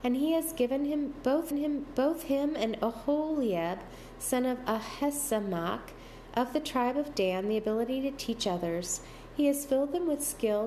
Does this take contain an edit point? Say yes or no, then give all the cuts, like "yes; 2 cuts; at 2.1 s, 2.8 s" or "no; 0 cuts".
yes; 1 cut; at 1.5 s